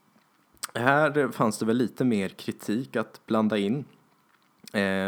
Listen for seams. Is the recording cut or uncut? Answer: uncut